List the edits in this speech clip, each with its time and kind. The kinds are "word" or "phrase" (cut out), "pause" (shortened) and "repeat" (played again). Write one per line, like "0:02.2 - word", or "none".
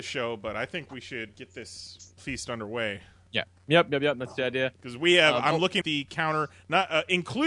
0:01.3 - word
0:02.2 - word
0:05.8 - word